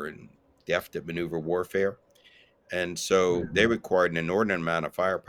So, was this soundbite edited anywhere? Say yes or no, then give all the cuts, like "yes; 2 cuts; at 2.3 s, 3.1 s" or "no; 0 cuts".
no; 0 cuts